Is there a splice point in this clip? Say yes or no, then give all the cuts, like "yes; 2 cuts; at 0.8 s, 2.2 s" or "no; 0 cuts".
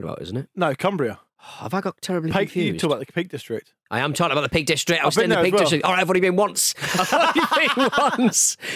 yes; 1 cut; at 1.3 s